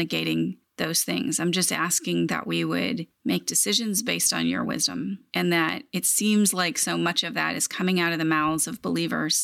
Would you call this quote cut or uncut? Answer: uncut